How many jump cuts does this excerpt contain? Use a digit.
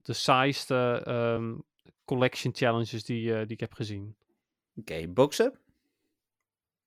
0